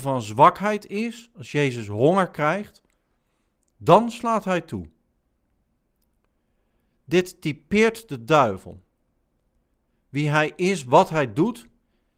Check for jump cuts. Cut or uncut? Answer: uncut